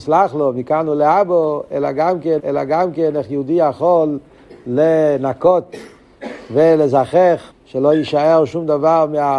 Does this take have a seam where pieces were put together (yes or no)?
yes